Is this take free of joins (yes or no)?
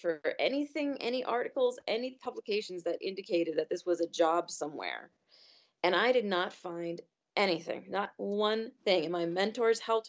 yes